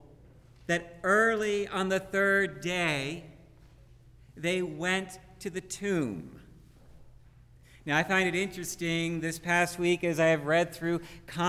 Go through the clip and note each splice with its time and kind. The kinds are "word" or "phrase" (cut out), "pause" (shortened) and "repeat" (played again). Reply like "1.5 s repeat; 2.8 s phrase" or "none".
none